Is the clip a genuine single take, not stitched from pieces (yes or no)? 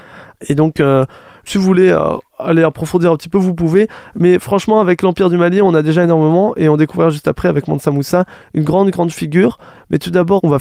yes